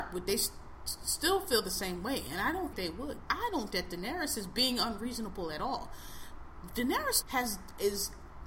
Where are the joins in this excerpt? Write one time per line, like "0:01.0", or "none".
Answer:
0:02.7
0:03.3
0:03.7
0:07.2